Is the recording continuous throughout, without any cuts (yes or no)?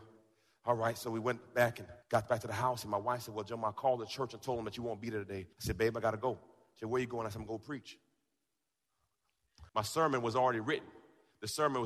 no